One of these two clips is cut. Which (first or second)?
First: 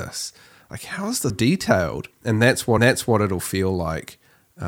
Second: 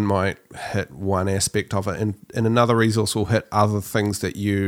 first